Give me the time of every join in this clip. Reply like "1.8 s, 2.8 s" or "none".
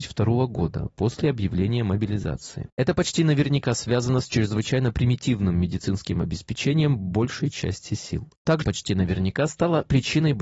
8.6 s

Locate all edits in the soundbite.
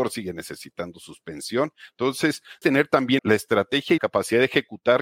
2.6 s, 3.2 s, 4.0 s

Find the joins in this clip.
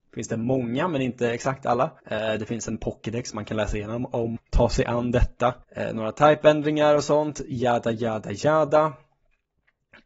2.0 s, 4.4 s, 5.6 s

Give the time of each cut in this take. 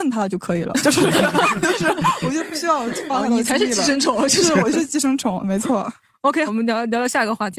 6.5 s

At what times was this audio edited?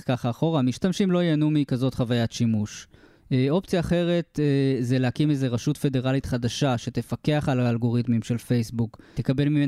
none

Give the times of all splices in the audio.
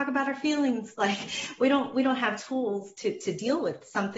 none

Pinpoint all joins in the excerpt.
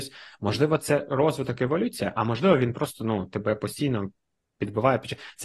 none

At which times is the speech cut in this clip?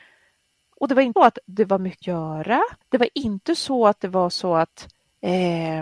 1.2 s, 2.0 s, 2.8 s

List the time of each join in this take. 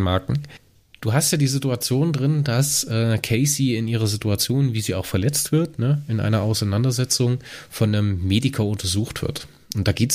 none

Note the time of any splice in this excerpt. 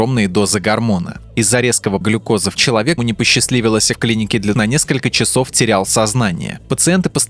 2.0 s, 2.6 s, 3.0 s, 3.9 s, 4.5 s

